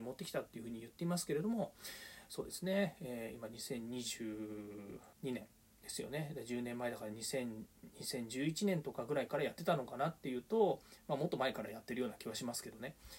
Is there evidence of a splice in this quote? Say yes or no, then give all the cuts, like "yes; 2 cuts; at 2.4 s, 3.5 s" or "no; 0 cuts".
yes; 1 cut; at 5.1 s